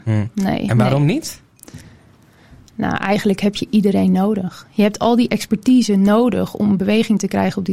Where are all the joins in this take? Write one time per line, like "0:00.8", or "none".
none